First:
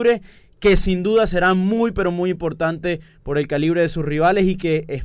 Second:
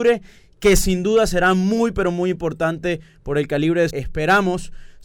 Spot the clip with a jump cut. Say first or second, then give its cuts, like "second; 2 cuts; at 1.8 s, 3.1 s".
second; 1 cut; at 3.9 s